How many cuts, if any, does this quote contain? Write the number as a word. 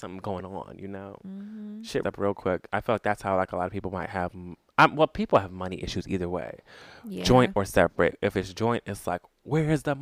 two